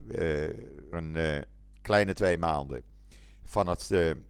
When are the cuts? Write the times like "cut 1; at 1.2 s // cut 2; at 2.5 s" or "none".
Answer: cut 1; at 0.9 s